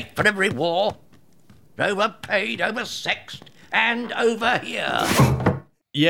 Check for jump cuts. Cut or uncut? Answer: uncut